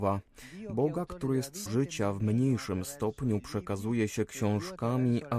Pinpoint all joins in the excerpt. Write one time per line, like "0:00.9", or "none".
0:01.7